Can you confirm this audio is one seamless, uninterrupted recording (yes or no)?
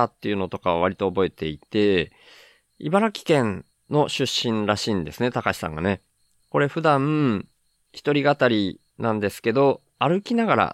yes